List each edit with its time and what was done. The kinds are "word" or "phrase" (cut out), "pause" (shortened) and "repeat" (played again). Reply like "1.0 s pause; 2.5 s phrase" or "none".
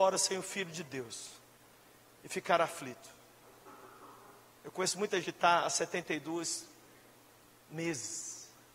5.2 s word